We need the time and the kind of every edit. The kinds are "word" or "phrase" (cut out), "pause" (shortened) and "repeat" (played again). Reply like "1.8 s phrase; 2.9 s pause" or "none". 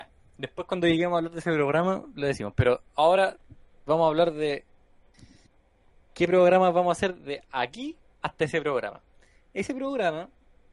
none